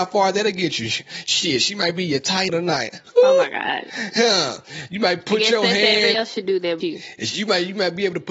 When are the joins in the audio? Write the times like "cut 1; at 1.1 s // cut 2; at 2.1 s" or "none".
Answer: cut 1; at 2.5 s // cut 2; at 6.1 s // cut 3; at 6.8 s